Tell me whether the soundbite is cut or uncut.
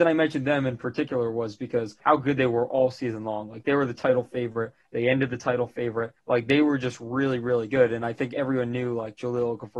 cut